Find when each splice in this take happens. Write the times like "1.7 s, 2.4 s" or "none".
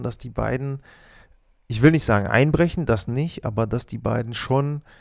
none